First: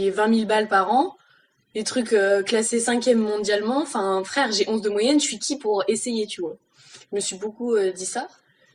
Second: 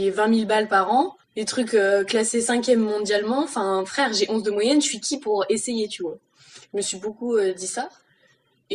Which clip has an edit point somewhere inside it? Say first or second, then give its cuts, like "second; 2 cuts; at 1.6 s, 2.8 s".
second; 1 cut; at 1.2 s